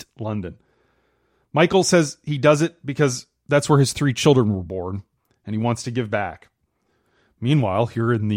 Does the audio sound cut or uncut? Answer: uncut